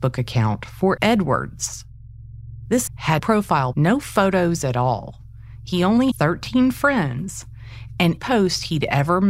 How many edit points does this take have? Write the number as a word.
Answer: six